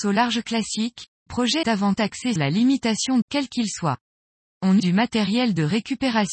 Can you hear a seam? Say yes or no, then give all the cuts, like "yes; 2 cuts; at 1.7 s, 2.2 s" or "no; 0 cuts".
yes; 6 cuts; at 1.3 s, 1.6 s, 2.0 s, 2.4 s, 3.2 s, 4.8 s